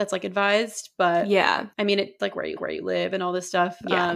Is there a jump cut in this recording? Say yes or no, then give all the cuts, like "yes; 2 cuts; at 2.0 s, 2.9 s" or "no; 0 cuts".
yes; 3 cuts; at 1.7 s, 2.2 s, 2.6 s